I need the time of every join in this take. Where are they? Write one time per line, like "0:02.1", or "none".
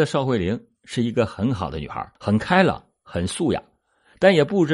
0:02.2